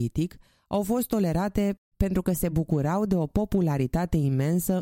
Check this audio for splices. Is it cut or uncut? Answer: uncut